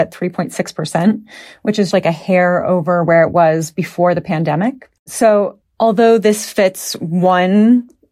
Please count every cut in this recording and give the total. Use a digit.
2